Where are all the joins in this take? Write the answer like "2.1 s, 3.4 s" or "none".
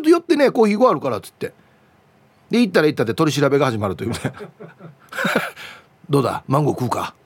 none